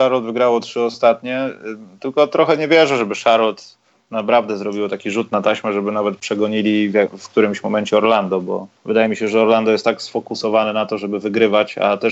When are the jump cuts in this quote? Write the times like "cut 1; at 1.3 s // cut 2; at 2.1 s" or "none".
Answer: cut 1; at 8.8 s